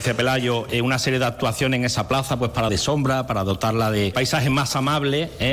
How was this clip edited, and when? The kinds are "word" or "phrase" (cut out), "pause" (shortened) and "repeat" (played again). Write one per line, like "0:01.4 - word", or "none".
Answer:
0:02.7 - word